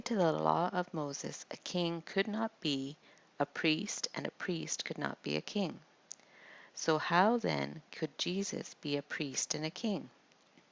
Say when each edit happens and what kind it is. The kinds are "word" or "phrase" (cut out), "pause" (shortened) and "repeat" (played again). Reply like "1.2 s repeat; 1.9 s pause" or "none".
none